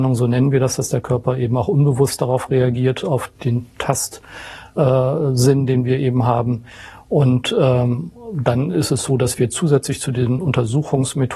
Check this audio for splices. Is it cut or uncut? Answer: uncut